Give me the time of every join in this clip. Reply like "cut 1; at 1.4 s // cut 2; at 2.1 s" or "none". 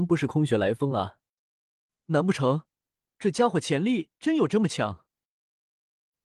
none